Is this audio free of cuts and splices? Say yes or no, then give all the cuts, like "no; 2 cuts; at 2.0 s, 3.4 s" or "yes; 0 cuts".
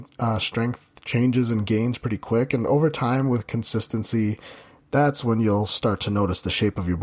yes; 0 cuts